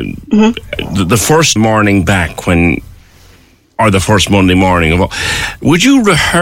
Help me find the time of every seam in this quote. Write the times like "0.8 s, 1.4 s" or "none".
1.6 s